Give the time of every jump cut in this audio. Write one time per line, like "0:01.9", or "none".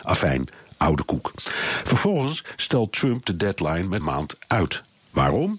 0:04.0